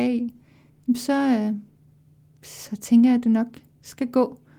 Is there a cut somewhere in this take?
no; 0 cuts

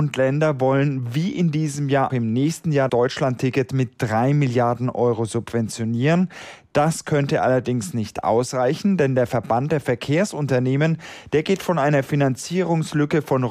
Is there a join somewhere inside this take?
yes; 2 cuts; at 2.1 s, 2.9 s

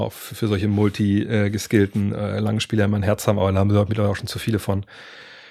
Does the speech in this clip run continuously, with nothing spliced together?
yes; 0 cuts

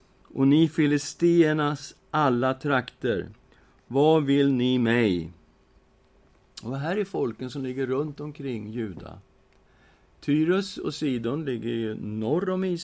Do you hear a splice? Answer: no; 0 cuts

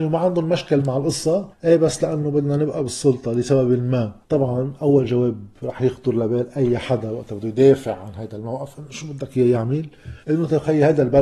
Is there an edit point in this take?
yes; 4 cuts; at 1.5 s, 4.2 s, 5.5 s, 10.2 s

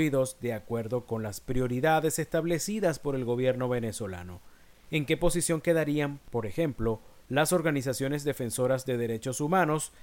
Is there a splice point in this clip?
no; 0 cuts

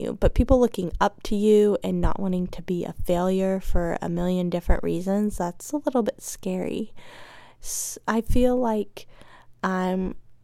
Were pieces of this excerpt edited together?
no; 0 cuts

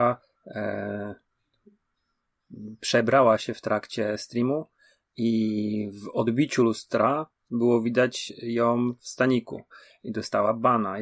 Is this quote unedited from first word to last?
yes; 0 cuts

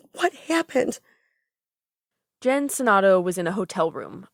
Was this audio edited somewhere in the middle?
no; 0 cuts

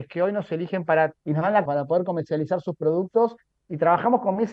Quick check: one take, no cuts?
no; 2 cuts; at 1.2 s, 1.7 s

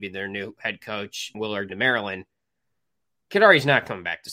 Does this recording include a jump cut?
yes; 2 cuts; at 1.3 s, 1.7 s

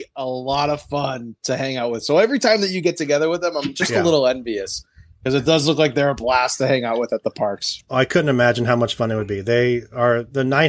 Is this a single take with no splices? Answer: yes; 0 cuts

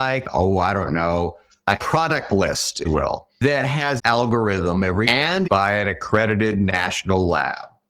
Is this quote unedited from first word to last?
no; 5 cuts; at 1.8 s, 2.8 s, 4.0 s, 5.0 s, 5.4 s

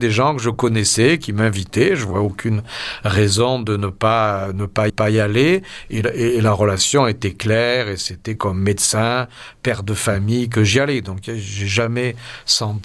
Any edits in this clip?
yes; 1 cut; at 4.9 s

